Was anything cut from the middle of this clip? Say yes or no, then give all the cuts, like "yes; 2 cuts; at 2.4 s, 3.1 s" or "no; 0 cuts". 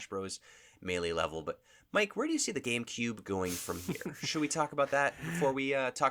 no; 0 cuts